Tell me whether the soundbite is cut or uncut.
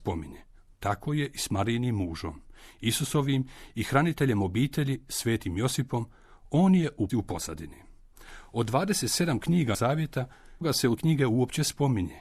cut